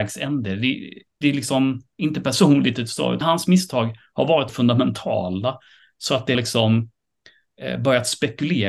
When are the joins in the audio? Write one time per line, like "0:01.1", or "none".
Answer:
0:01.2
0:03.2
0:04.5
0:06.3